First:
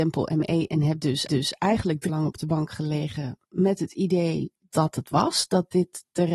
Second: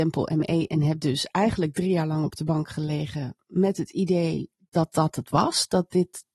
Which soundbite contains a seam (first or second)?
first